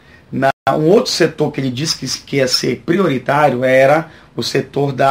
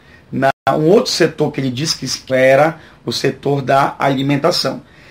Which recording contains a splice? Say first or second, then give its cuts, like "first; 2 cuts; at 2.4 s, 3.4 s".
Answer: second; 1 cut; at 2.3 s